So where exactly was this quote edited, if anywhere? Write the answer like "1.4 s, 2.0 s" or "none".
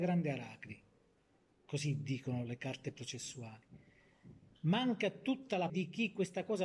5.7 s